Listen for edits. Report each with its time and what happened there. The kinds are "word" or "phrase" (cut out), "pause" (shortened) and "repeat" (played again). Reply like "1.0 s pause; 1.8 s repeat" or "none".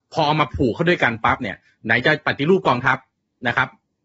none

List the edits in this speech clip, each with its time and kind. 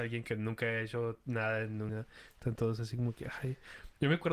1.9 s word

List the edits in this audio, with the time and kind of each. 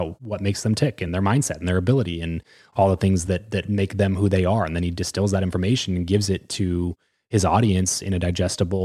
none

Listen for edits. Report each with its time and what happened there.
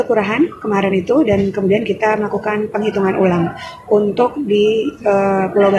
none

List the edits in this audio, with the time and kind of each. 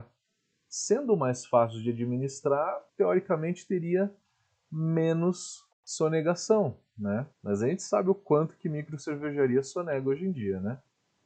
2.9 s pause; 5.7 s pause; 7.3 s pause

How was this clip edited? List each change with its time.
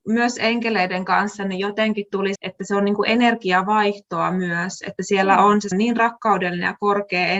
2.3 s word; 5.7 s word

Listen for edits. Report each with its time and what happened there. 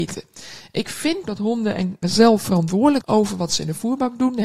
1.2 s word; 2.0 s word; 3.0 s word

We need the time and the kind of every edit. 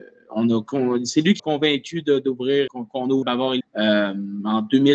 1.4 s word; 2.7 s word; 3.2 s word; 3.6 s word

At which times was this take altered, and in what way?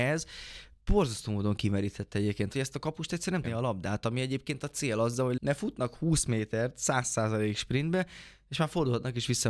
2.5 s phrase; 3.4 s phrase; 5.4 s word

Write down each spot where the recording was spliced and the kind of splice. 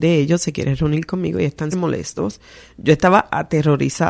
1.7 s word

